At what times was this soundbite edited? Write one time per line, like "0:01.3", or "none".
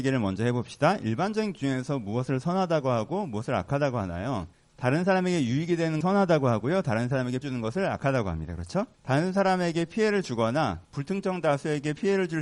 0:04.5
0:06.0
0:07.4
0:08.9
0:10.8